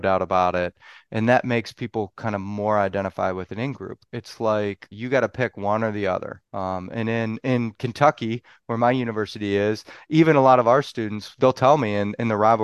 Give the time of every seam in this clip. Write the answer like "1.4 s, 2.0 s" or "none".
4.9 s, 6.5 s